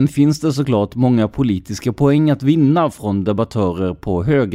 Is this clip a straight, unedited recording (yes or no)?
yes